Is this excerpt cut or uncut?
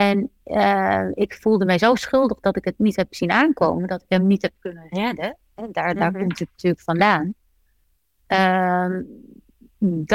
uncut